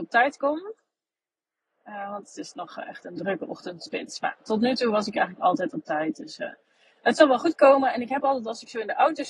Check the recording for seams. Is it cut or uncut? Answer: uncut